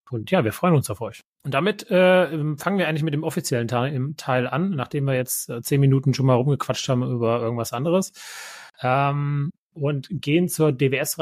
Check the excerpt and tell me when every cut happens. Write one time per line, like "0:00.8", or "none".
0:01.3
0:08.7